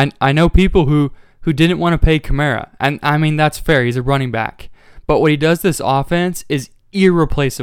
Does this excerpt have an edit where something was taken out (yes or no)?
yes